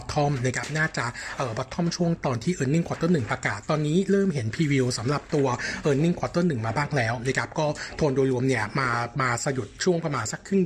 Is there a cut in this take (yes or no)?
no